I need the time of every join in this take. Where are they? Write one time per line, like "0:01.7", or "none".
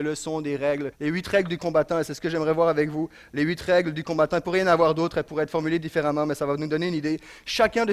0:00.9

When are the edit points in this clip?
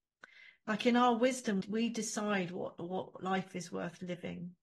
0:01.6

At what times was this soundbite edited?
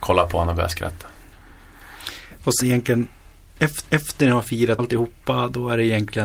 0:02.6
0:03.9
0:04.8

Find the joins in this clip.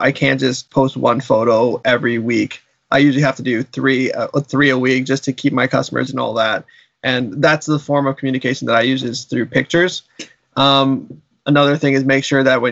0:06.1

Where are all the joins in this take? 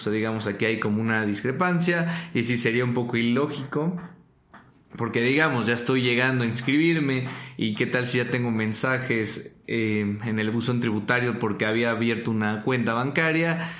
none

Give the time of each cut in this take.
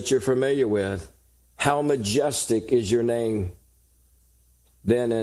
none

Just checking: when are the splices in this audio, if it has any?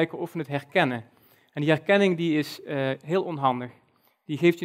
none

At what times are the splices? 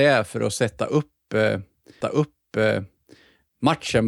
0:02.0

